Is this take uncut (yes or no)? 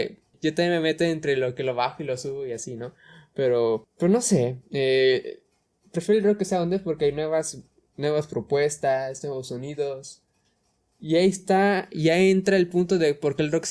yes